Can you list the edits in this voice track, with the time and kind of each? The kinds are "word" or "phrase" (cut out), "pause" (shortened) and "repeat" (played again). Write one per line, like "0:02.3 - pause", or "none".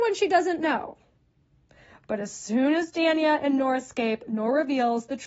none

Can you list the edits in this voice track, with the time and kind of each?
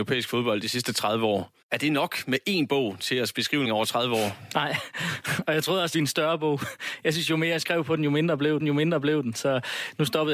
0:01.6 - pause
0:03.6 - word
0:05.9 - phrase
0:08.6 - repeat

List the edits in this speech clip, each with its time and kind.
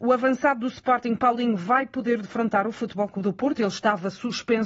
none

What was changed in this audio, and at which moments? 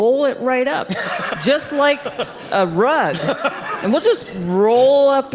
none

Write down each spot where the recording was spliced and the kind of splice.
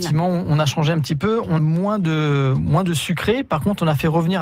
0:01.6 - word

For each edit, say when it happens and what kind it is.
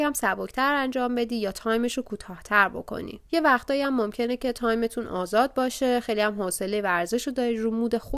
0:03.3 - pause

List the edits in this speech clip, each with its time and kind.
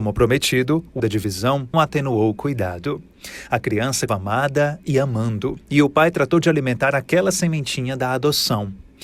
0:01.0 - word
0:01.7 - word
0:04.1 - word
0:05.6 - pause

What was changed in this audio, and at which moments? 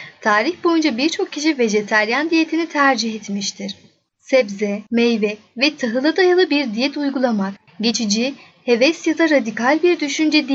none

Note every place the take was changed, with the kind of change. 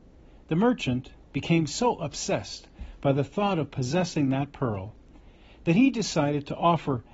none

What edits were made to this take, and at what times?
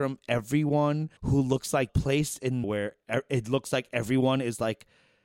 0:01.2 - pause
0:01.9 - phrase
0:02.6 - word

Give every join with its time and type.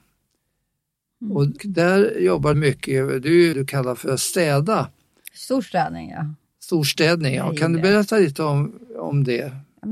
0:01.6 - word
0:02.5 - word
0:03.5 - phrase

